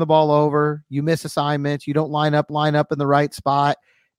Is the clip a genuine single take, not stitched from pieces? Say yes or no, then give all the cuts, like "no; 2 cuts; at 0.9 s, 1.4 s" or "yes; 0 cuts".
no; 1 cut; at 2.5 s